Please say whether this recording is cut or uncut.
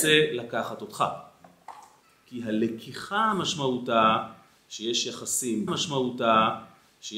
cut